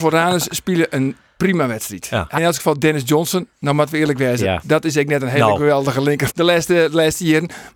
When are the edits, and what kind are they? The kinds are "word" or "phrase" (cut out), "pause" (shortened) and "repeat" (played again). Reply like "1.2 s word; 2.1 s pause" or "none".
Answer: 2.4 s word; 6.3 s word